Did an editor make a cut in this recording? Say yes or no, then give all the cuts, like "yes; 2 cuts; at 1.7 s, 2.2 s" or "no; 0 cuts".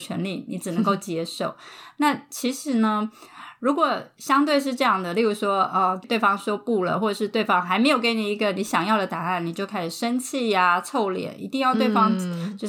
no; 0 cuts